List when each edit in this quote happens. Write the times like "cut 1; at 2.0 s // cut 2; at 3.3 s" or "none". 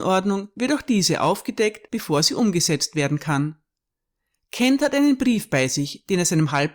none